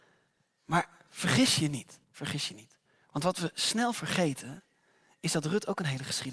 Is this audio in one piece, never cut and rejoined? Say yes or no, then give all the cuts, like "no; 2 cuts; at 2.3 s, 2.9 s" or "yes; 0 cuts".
no; 2 cuts; at 2.0 s, 2.8 s